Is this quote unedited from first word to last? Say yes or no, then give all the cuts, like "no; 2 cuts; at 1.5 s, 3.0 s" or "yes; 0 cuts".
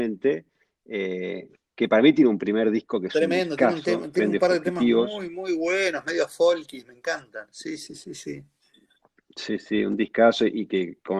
yes; 0 cuts